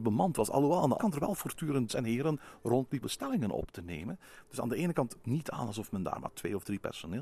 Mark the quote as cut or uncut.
cut